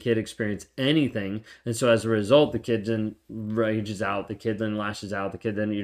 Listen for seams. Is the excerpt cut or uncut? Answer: uncut